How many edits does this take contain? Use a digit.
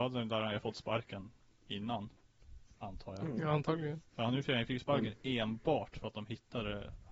1